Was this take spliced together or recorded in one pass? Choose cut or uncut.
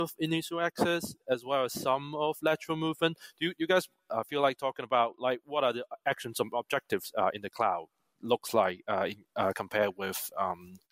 uncut